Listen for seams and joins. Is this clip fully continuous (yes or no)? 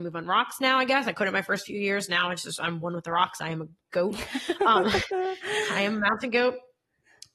yes